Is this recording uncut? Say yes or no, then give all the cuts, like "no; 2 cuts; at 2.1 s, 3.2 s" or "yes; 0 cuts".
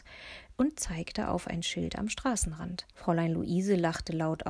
no; 1 cut; at 2.9 s